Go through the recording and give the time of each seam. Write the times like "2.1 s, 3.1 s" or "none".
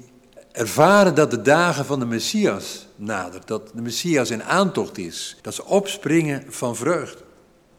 5.4 s